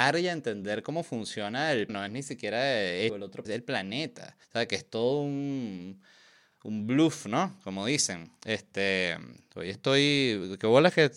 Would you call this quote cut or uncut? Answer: cut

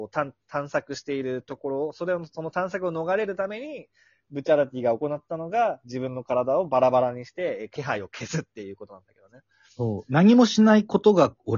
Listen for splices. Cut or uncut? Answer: uncut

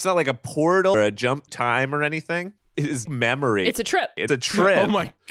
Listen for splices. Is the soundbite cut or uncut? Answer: cut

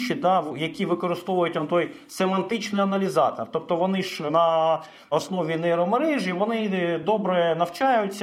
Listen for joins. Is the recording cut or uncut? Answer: uncut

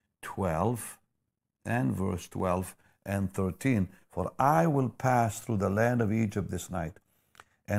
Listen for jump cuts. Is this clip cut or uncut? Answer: uncut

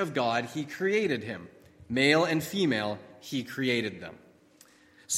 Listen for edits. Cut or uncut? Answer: uncut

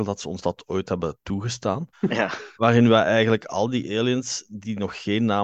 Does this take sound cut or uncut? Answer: cut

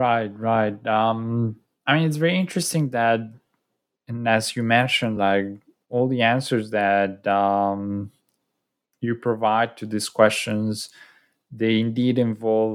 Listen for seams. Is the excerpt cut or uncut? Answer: uncut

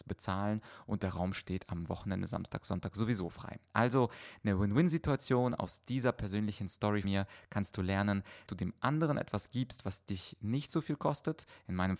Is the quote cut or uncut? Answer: cut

